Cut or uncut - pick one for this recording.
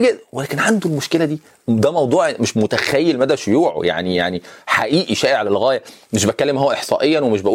uncut